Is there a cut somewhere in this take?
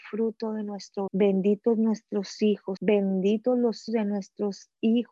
yes; 3 cuts; at 1.1 s, 2.8 s, 3.9 s

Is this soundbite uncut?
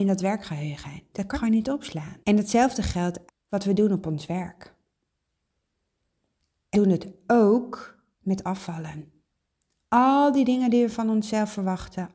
no; 5 cuts; at 1.3 s, 2.2 s, 3.3 s, 6.7 s, 8.1 s

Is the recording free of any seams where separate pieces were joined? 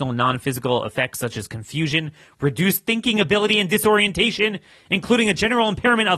yes; 0 cuts

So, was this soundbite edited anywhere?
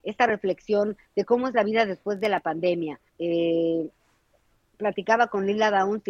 yes; 1 cut; at 3.1 s

